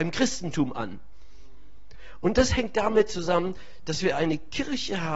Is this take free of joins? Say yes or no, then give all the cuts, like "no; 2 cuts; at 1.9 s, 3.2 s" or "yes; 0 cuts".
yes; 0 cuts